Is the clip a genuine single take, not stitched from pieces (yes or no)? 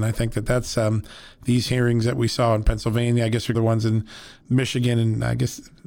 no